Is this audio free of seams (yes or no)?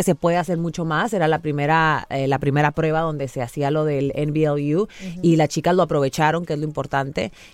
yes